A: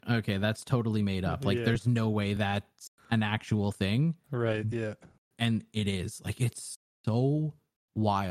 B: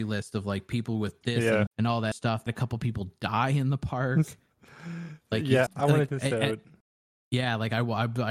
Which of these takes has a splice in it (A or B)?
B